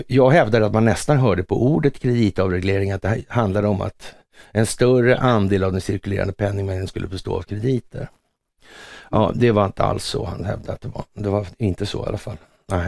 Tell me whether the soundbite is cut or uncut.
uncut